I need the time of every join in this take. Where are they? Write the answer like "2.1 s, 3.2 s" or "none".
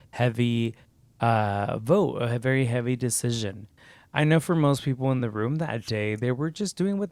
none